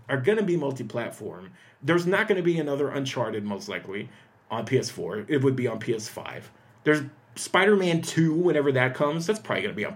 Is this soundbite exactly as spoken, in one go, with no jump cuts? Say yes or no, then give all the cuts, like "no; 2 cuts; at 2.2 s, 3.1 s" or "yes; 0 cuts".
yes; 0 cuts